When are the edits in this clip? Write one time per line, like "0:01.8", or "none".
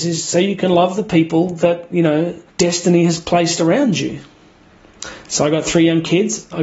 0:02.5